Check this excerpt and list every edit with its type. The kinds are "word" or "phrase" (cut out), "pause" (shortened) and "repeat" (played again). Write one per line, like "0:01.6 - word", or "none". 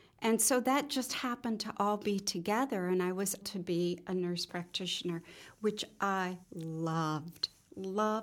0:03.4 - word
0:06.4 - pause